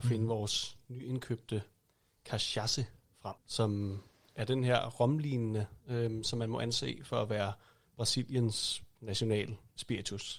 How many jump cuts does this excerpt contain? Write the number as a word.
one